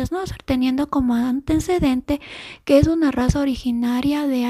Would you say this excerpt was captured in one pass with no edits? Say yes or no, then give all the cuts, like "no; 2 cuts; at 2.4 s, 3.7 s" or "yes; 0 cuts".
yes; 0 cuts